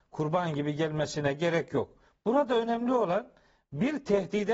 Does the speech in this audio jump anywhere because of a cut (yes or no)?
no